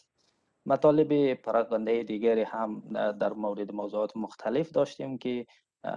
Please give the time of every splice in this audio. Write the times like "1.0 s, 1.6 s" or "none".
none